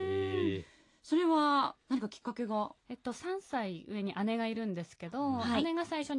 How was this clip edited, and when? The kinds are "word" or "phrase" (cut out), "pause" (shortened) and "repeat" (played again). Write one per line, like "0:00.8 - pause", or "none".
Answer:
0:02.8 - pause

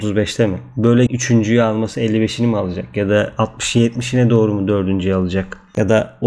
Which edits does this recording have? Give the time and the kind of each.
0:01.1 - word

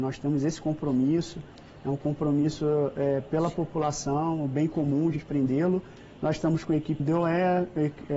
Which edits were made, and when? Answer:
0:05.2 - word
0:07.0 - word

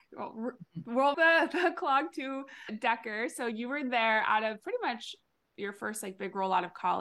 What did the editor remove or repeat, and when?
0:01.1 - word

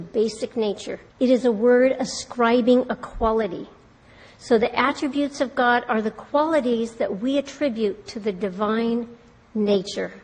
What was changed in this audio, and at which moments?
0:01.1 - pause

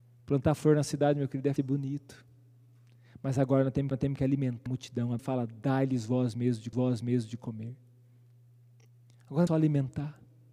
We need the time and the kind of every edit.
0:01.6 - word
0:03.9 - repeat
0:04.7 - word
0:05.2 - word
0:06.7 - repeat
0:09.5 - phrase

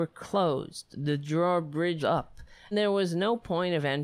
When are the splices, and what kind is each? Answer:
0:02.0 - word
0:02.7 - word

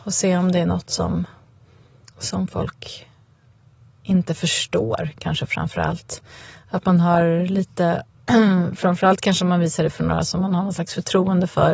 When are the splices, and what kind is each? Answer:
none

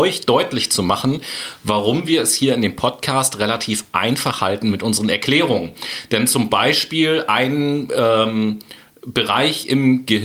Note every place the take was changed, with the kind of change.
none

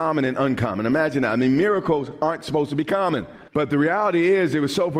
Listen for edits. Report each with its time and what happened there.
0:03.5 - pause

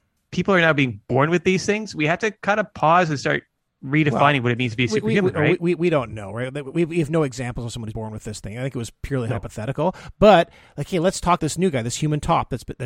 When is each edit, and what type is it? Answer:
0:07.9 - word
0:11.4 - word

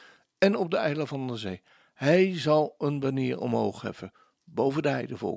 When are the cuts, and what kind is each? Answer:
none

